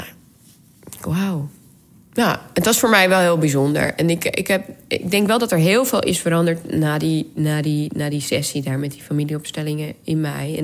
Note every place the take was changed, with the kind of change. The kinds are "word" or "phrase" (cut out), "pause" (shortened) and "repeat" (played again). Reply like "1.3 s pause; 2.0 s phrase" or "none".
none